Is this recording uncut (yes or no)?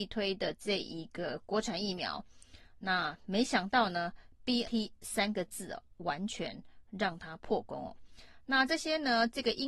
no